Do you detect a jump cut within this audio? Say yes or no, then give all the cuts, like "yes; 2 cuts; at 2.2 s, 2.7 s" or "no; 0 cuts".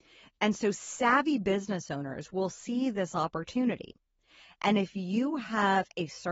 no; 0 cuts